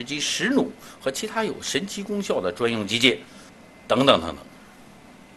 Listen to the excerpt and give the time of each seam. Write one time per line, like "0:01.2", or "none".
0:03.5